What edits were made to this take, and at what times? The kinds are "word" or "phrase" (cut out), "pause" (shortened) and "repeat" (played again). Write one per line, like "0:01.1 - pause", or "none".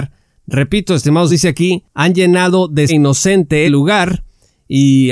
0:01.3 - word
0:02.9 - word
0:03.7 - word